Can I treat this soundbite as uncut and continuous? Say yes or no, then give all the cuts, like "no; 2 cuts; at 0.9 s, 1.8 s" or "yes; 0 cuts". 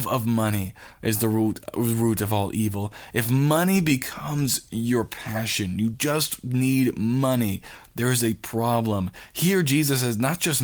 yes; 0 cuts